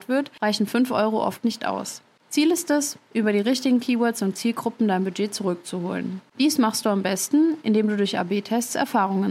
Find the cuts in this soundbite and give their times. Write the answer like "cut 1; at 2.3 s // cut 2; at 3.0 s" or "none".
none